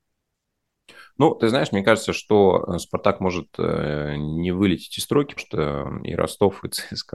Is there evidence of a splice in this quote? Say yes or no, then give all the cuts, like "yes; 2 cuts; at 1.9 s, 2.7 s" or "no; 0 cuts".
yes; 1 cut; at 5.4 s